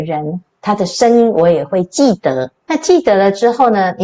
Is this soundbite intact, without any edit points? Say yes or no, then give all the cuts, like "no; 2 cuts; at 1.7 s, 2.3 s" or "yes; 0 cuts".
no; 1 cut; at 2.6 s